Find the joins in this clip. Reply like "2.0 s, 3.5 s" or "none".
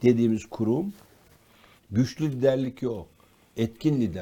1.8 s